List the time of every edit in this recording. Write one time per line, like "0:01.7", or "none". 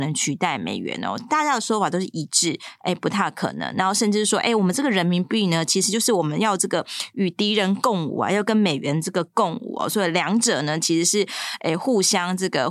none

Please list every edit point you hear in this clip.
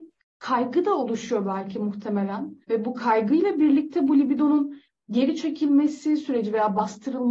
0:02.6

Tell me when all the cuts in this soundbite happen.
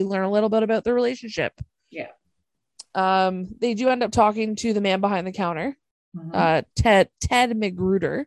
none

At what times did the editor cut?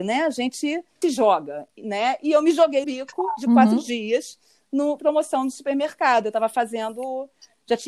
0:01.0
0:02.8
0:05.0

